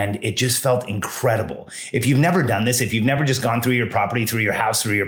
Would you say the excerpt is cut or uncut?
uncut